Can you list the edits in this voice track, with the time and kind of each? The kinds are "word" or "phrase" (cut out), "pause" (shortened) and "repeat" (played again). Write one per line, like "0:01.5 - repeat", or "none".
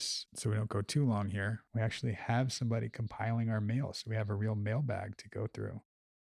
0:01.7 - pause